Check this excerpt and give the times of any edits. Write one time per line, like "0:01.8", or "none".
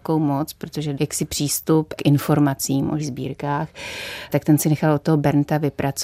0:00.9
0:02.0
0:03.0